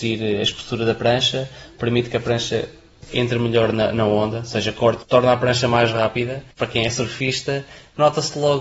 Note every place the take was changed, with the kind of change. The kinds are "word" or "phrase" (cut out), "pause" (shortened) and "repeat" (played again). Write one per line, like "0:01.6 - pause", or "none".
0:05.0 - word
0:06.5 - pause